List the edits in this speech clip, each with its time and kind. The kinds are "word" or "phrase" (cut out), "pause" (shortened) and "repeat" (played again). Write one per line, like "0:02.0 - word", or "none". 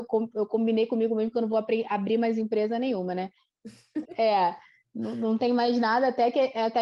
0:04.0 - word